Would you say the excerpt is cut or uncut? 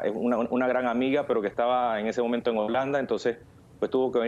uncut